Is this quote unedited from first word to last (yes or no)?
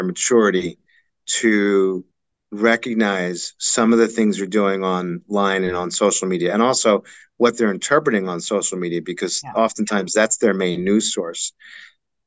yes